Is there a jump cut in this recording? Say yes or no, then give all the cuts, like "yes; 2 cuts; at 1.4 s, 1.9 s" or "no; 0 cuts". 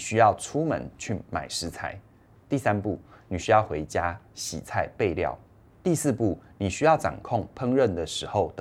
no; 0 cuts